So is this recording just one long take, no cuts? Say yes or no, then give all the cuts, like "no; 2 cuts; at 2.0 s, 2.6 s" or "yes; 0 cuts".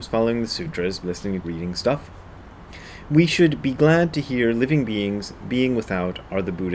no; 2 cuts; at 1.0 s, 1.4 s